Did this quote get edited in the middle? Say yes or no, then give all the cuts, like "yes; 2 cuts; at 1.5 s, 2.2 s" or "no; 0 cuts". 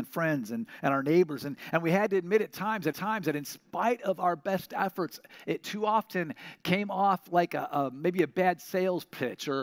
yes; 1 cut; at 2.9 s